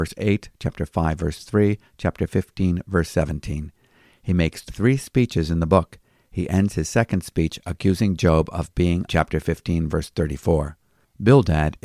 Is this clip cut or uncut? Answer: cut